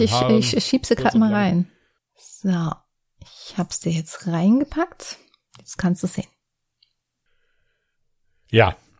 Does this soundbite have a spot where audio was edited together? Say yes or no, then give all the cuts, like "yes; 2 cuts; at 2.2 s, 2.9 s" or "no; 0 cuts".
no; 0 cuts